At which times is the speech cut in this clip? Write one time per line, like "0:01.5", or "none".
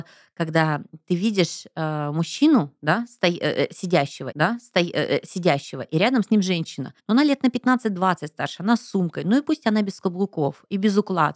0:04.3
0:07.0